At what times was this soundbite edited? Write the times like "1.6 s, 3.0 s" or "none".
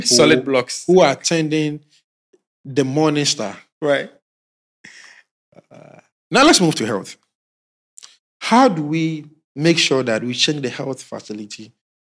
none